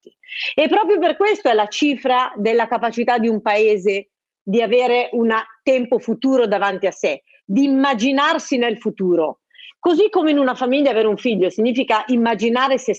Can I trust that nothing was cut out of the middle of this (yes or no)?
yes